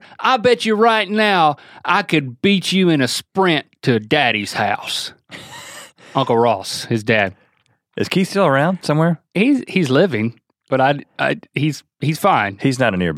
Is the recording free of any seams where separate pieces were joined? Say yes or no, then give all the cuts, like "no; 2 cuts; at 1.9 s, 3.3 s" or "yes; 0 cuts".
yes; 0 cuts